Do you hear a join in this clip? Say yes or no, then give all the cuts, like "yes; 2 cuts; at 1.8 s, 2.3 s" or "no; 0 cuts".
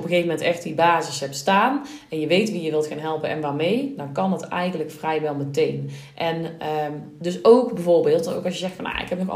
no; 0 cuts